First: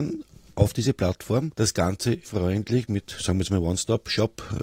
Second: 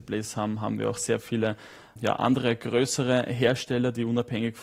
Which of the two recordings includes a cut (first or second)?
first